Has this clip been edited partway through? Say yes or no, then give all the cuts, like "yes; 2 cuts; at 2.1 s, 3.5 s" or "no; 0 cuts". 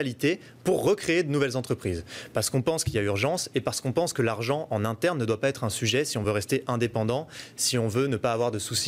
no; 0 cuts